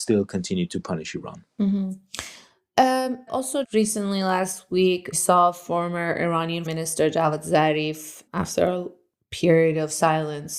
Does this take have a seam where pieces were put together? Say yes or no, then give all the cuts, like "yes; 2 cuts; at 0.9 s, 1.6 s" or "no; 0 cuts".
yes; 5 cuts; at 3.3 s, 3.6 s, 5.1 s, 6.7 s, 8.3 s